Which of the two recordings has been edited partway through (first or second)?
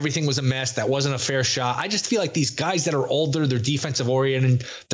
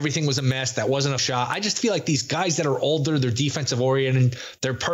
second